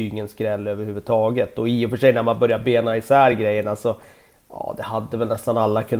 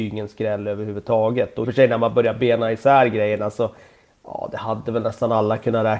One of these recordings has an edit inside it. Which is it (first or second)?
second